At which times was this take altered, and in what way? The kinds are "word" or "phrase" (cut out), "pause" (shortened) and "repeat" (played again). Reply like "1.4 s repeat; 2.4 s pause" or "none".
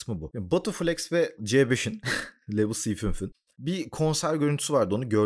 1.4 s word